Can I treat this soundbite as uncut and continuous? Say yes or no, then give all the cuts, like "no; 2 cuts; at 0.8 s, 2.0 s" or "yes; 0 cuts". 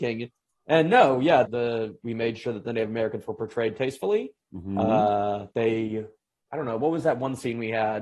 no; 3 cuts; at 1.4 s, 2.0 s, 5.5 s